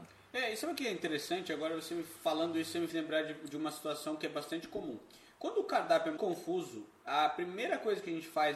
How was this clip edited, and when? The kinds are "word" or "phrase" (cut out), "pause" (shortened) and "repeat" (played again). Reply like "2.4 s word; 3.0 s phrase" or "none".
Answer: 2.9 s word; 6.2 s word